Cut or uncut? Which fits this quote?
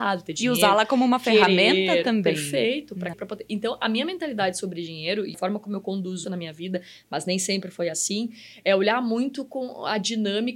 cut